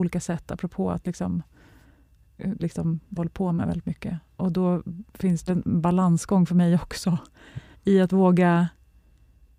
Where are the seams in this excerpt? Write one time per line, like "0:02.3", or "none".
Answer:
0:02.6
0:03.2
0:05.1
0:05.5
0:07.7